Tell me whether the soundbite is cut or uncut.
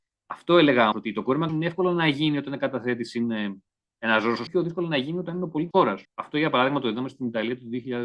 cut